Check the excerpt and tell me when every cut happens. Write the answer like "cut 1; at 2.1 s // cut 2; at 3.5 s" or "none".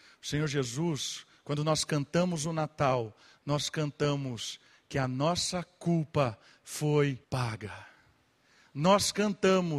cut 1; at 7.2 s